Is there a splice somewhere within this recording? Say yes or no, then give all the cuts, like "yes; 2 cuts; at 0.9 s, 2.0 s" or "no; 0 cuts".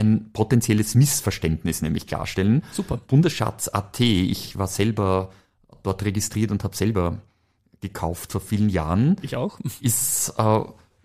no; 0 cuts